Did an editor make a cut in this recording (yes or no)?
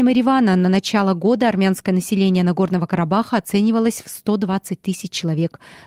no